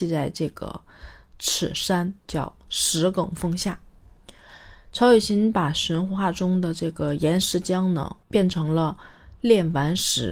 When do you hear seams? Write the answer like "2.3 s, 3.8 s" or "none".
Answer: 2.2 s, 8.2 s